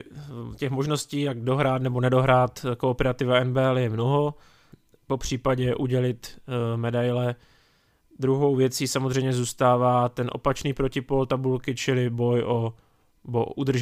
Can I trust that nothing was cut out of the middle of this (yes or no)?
yes